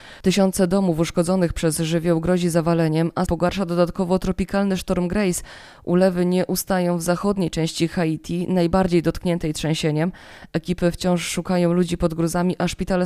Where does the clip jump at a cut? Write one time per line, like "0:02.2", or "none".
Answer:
0:03.3